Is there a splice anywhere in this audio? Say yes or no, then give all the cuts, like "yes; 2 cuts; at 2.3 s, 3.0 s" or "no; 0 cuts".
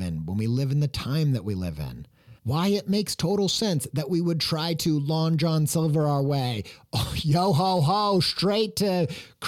yes; 1 cut; at 2.4 s